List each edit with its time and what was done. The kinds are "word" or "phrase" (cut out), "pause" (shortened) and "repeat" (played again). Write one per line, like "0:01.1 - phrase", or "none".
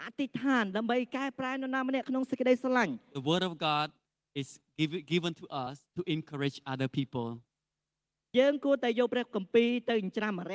none